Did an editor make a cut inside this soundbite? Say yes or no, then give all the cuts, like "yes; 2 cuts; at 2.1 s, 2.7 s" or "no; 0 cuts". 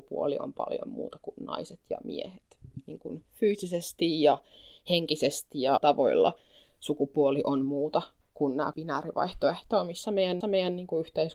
yes; 4 cuts; at 5.8 s, 8.2 s, 8.7 s, 10.4 s